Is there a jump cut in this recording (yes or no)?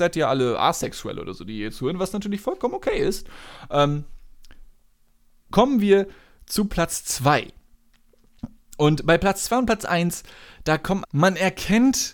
yes